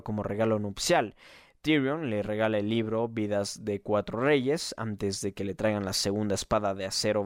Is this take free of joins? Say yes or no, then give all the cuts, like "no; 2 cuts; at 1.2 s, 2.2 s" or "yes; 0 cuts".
yes; 0 cuts